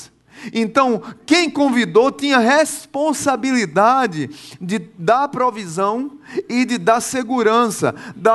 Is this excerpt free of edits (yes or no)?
yes